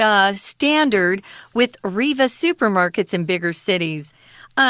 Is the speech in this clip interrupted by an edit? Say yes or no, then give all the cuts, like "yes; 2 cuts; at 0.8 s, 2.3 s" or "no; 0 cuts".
no; 0 cuts